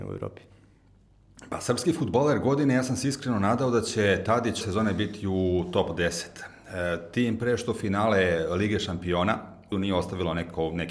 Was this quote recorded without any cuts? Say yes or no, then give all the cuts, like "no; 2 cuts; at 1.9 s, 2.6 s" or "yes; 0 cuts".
no; 2 cuts; at 4.6 s, 9.7 s